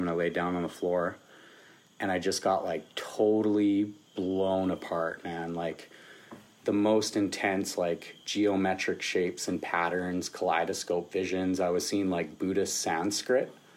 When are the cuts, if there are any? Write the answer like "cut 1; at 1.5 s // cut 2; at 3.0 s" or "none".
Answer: cut 1; at 8.2 s